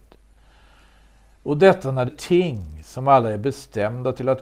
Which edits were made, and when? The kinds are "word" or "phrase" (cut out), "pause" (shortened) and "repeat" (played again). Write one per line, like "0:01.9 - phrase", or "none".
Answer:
0:02.1 - word